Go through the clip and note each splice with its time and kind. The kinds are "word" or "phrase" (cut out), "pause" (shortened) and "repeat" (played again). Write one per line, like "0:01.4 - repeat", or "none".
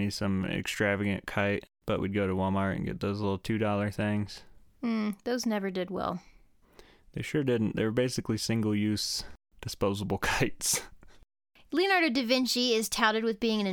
none